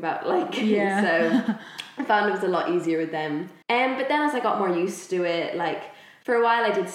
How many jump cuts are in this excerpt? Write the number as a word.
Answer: one